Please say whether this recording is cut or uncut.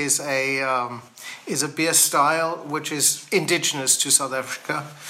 uncut